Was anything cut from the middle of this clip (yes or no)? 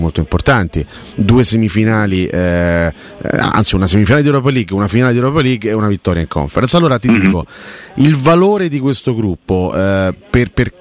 no